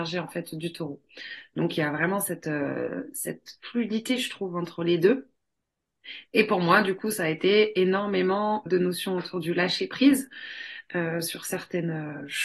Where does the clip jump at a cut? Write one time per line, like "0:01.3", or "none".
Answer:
0:08.7